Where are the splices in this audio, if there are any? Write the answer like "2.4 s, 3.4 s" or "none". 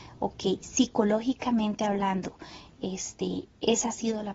none